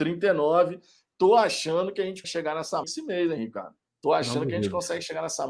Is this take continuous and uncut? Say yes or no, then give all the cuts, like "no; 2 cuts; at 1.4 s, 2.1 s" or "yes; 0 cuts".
no; 3 cuts; at 2.2 s, 2.8 s, 3.9 s